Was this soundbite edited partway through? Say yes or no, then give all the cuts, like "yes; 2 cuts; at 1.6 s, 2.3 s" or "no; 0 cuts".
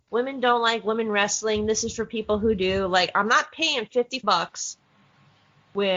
yes; 1 cut; at 4.2 s